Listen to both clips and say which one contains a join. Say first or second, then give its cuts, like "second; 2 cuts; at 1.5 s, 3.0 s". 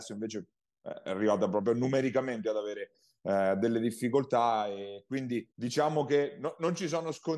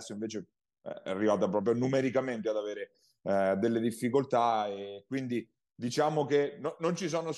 first; 1 cut; at 5.5 s